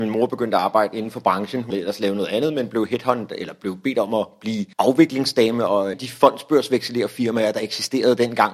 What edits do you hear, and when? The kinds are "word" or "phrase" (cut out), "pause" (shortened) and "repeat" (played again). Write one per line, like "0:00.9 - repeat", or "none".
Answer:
0:01.7 - word
0:04.7 - pause
0:05.9 - phrase